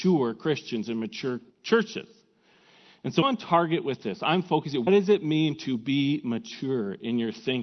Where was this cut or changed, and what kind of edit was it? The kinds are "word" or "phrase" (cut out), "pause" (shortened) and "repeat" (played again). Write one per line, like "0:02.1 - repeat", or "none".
0:01.5 - pause
0:03.2 - word
0:04.9 - word